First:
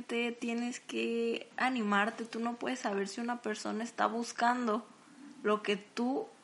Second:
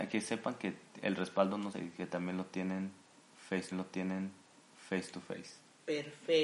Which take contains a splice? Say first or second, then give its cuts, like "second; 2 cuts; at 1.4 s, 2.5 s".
second; 2 cuts; at 1.7 s, 3.7 s